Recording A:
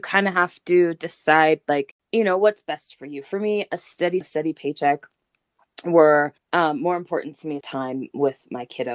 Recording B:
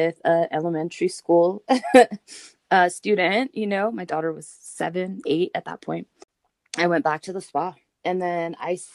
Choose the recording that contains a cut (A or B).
A